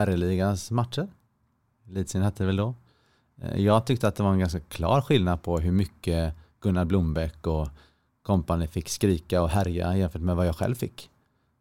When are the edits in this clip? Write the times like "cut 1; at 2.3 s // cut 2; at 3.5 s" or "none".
none